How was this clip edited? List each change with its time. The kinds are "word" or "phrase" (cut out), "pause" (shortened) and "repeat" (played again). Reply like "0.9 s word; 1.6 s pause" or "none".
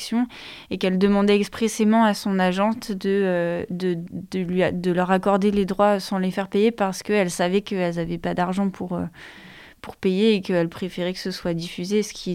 none